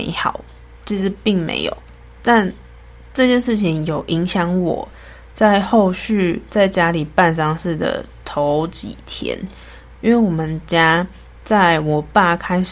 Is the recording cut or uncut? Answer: uncut